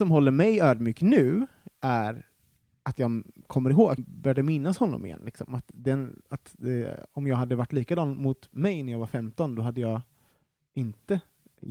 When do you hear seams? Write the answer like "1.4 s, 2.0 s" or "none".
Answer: 4.0 s